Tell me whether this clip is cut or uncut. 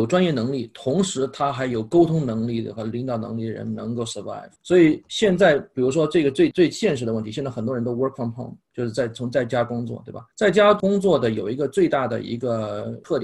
cut